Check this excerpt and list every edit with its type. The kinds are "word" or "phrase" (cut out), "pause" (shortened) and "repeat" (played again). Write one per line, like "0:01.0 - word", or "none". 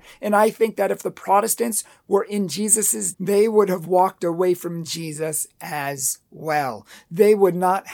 0:03.1 - word